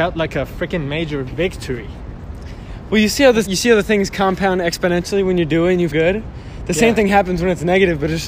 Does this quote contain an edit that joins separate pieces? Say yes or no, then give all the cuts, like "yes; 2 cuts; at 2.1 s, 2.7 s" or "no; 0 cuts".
yes; 2 cuts; at 3.5 s, 5.9 s